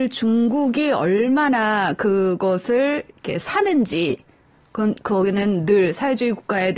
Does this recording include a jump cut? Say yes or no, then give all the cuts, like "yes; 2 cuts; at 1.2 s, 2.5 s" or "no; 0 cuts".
no; 0 cuts